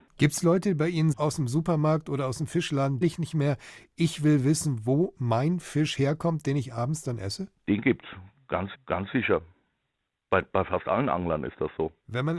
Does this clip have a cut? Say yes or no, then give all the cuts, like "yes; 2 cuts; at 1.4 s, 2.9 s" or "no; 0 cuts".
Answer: yes; 3 cuts; at 1.1 s, 3.0 s, 8.7 s